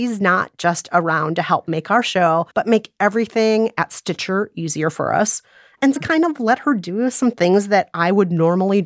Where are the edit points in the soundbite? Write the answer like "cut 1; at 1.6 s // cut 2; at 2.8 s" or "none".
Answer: cut 1; at 2.5 s // cut 2; at 6.0 s

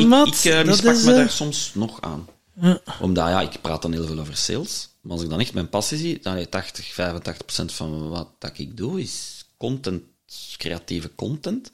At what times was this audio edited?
none

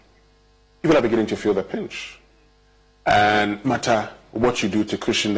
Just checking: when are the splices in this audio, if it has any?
cut 1; at 3.6 s

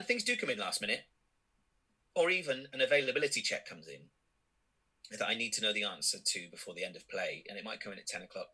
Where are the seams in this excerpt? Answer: none

